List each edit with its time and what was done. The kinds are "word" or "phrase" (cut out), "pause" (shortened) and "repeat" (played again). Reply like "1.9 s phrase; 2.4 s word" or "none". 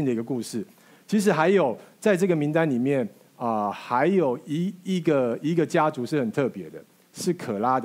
none